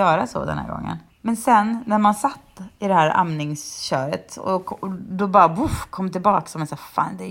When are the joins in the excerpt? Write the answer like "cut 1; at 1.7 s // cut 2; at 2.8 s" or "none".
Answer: none